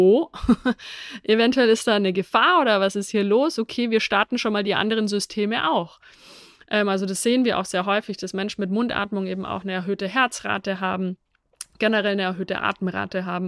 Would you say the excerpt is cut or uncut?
uncut